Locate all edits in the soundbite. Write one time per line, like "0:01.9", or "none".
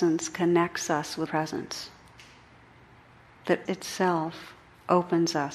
0:01.3
0:03.7